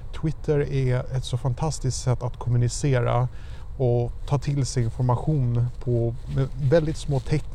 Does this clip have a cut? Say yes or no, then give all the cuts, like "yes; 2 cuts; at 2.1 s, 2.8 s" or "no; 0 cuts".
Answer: no; 0 cuts